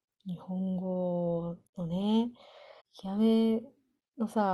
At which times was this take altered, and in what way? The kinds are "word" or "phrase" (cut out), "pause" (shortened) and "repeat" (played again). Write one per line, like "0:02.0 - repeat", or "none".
0:01.7 - pause
0:02.8 - pause